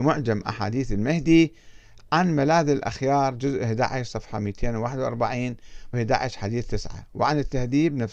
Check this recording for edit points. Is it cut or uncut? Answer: cut